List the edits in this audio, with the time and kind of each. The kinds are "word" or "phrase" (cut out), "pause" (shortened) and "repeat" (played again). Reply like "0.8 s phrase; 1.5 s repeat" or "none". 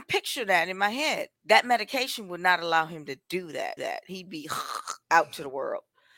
1.4 s pause; 3.8 s repeat; 5.0 s pause